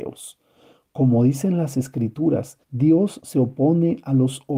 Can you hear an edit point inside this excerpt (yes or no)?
yes